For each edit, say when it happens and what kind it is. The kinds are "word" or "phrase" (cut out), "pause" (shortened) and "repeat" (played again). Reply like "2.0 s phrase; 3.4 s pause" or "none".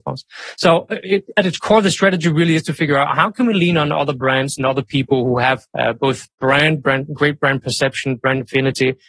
5.7 s pause